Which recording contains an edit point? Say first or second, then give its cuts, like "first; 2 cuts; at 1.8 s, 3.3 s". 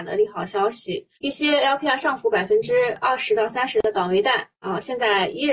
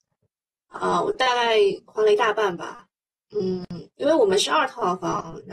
first; 2 cuts; at 1.2 s, 4.6 s